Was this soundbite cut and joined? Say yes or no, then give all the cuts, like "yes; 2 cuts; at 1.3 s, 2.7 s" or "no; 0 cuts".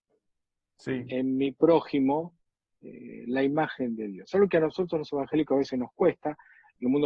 no; 0 cuts